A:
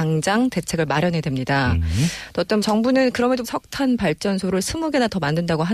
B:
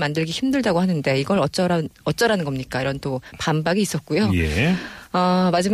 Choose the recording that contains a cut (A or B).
A